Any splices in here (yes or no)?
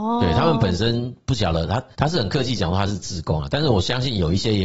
yes